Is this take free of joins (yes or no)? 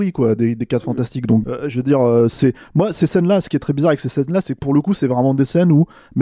no